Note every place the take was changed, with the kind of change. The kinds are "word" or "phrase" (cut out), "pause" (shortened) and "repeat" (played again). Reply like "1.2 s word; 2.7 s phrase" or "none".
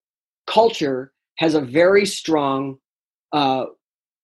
none